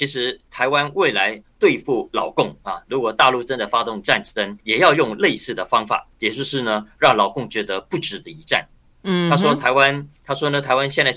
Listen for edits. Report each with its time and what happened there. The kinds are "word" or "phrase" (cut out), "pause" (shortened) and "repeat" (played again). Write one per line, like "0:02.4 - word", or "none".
0:04.6 - pause
0:06.1 - pause
0:10.2 - pause